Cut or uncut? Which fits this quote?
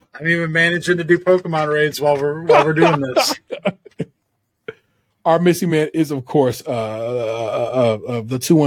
uncut